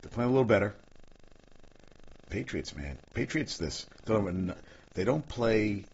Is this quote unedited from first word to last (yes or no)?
no